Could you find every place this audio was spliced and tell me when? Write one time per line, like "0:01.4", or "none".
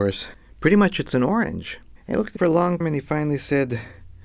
0:02.4
0:02.8